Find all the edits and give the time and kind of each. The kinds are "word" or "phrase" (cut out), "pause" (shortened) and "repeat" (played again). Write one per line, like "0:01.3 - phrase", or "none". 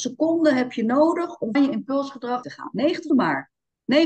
0:01.5 - word
0:02.4 - phrase
0:03.1 - word